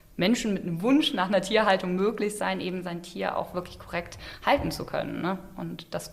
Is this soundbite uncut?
yes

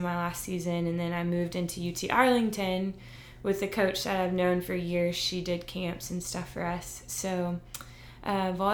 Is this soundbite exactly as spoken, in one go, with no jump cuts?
yes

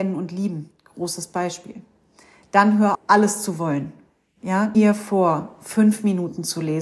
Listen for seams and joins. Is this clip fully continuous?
no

